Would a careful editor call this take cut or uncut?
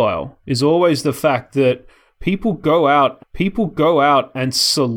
cut